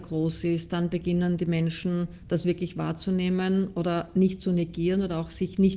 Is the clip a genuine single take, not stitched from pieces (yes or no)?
yes